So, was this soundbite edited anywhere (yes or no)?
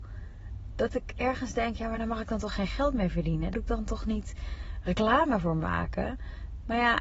yes